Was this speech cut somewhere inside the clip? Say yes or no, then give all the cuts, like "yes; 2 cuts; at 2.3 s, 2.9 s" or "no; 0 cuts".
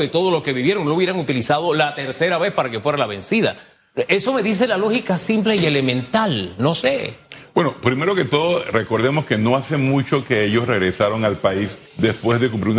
yes; 1 cut; at 11.9 s